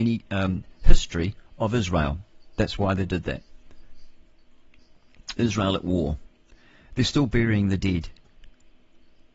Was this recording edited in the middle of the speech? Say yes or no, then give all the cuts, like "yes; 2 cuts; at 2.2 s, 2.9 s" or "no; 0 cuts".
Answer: no; 0 cuts